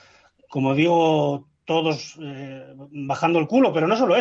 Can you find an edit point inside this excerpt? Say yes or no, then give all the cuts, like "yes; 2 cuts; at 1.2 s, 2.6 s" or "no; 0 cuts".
no; 0 cuts